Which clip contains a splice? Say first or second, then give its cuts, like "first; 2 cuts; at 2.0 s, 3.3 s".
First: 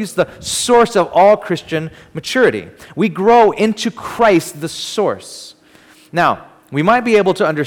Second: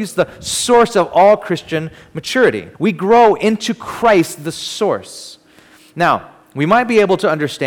second; 1 cut; at 2.7 s